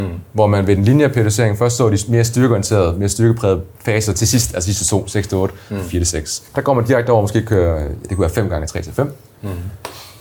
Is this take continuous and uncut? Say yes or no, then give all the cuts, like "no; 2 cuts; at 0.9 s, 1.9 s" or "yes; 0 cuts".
no; 2 cuts; at 3.7 s, 6.5 s